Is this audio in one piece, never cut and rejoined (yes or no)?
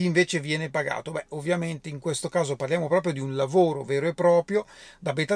yes